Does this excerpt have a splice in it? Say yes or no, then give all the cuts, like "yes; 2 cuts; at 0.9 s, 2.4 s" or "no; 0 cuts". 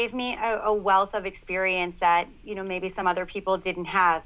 no; 0 cuts